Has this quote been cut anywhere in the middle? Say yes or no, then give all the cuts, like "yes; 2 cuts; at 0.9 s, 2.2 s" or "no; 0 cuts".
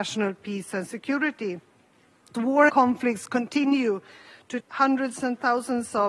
yes; 3 cuts; at 2.3 s, 2.7 s, 4.6 s